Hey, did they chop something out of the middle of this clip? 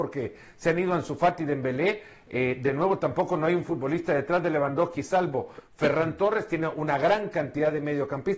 no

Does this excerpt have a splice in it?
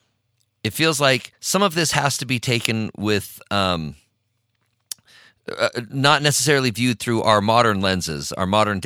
no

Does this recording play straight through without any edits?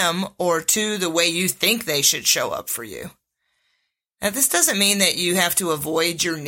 yes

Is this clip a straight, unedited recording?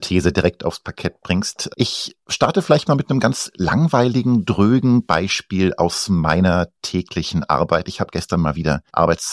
yes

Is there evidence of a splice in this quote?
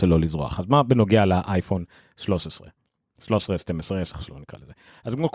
no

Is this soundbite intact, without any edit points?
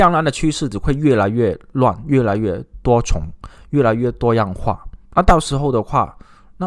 no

